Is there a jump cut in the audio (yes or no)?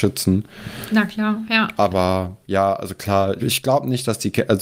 yes